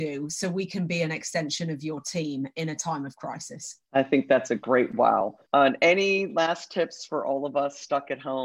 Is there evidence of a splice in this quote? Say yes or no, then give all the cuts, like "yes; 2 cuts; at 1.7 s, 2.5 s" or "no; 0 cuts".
yes; 2 cuts; at 3.8 s, 5.5 s